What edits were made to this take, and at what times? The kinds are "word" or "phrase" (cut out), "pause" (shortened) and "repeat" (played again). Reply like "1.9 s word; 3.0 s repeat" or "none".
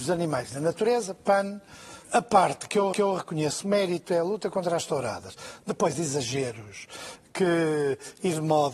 2.0 s pause; 2.9 s repeat; 5.9 s phrase